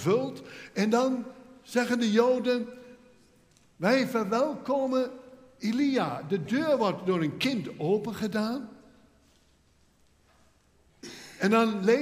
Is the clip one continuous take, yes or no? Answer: yes